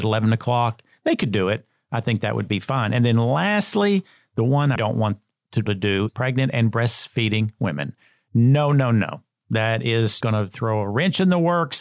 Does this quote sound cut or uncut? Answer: cut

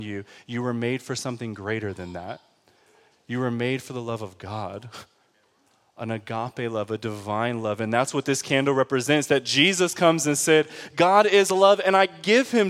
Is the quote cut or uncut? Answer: uncut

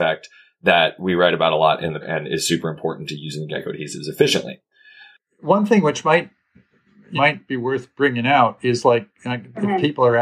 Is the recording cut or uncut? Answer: cut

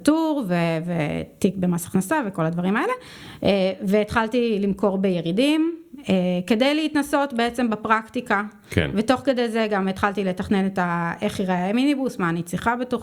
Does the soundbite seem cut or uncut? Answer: uncut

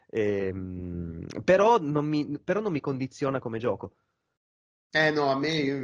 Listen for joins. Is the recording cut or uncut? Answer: uncut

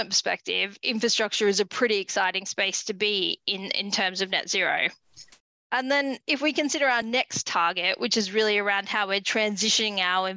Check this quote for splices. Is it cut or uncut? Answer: uncut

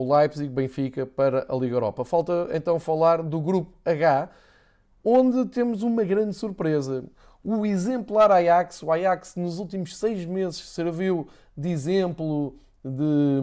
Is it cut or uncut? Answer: uncut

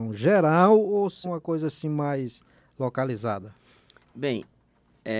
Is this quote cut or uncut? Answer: cut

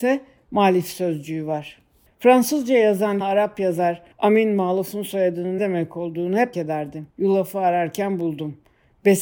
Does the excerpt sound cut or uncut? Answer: cut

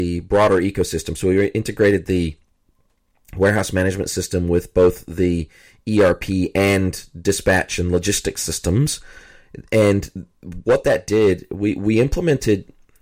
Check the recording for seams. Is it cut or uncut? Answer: uncut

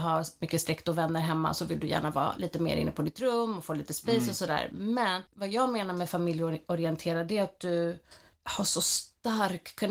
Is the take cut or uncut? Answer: uncut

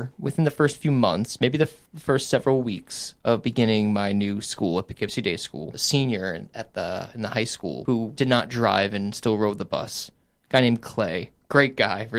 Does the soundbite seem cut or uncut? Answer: uncut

